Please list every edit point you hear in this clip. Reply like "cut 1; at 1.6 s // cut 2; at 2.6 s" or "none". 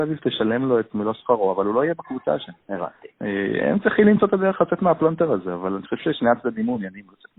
cut 1; at 2.6 s